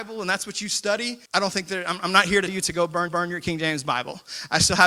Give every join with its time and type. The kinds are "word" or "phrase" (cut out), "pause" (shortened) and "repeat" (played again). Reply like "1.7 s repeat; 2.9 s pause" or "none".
1.3 s pause; 2.5 s word; 3.1 s repeat